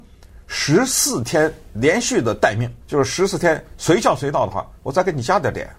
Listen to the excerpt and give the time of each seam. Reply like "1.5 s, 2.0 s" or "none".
2.8 s, 4.8 s